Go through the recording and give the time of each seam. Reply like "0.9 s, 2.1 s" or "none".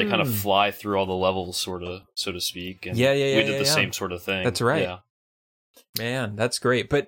none

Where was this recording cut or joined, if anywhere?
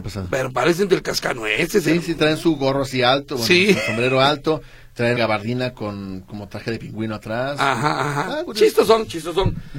2.2 s, 5.2 s, 8.5 s

